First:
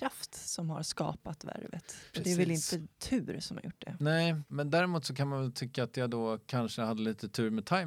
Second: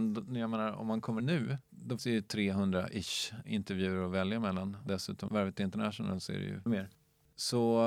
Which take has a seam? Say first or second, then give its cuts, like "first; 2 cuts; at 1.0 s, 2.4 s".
second; 5 cuts; at 1.2 s, 2.0 s, 4.9 s, 5.3 s, 6.7 s